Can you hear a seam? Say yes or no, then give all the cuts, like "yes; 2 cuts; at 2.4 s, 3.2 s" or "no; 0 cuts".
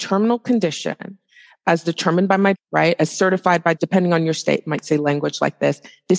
yes; 2 cuts; at 2.5 s, 3.8 s